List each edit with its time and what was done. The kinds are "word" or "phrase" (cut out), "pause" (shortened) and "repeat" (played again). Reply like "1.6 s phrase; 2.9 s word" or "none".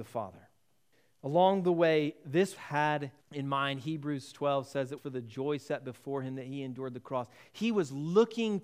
0.9 s pause; 2.6 s phrase; 3.2 s pause; 5.0 s word